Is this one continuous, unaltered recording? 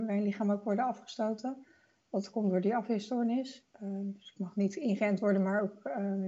yes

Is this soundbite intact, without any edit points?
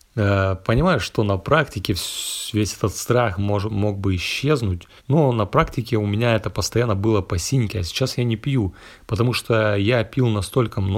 no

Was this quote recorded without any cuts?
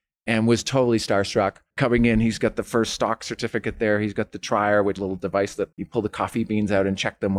no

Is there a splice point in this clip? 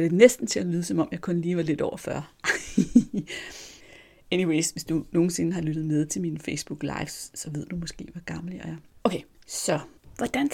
no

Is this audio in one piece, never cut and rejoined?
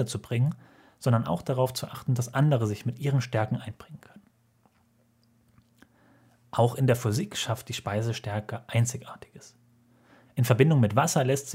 yes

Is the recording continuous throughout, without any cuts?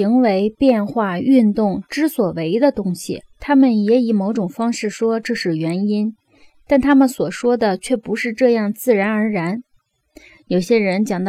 yes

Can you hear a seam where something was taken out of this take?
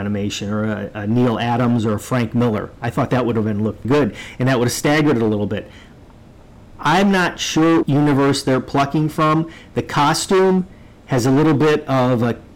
yes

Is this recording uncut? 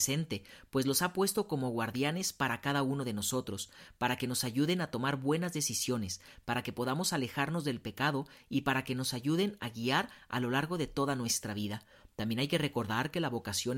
yes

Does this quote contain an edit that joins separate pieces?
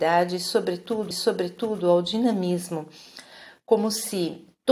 yes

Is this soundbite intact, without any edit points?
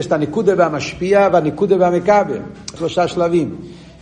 no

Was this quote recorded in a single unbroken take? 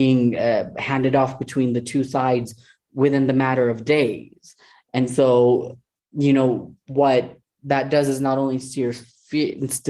yes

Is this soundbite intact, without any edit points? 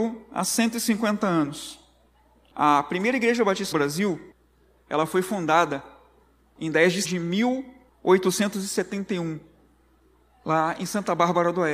no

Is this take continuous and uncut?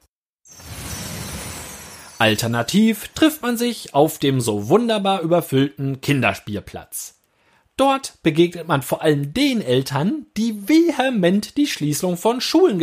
yes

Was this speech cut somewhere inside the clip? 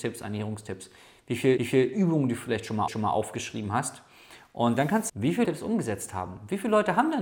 yes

